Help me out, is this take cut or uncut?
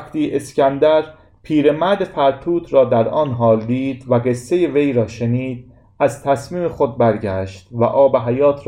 uncut